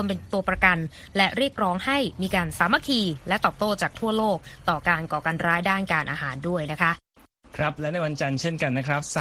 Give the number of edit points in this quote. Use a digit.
0